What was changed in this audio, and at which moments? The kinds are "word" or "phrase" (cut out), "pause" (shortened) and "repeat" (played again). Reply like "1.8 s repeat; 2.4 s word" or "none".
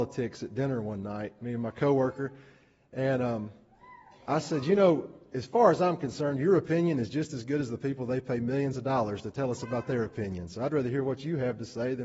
none